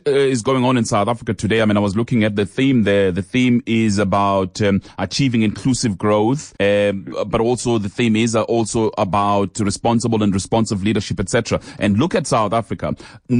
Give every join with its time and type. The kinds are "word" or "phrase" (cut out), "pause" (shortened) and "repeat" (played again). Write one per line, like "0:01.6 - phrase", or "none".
0:06.6 - pause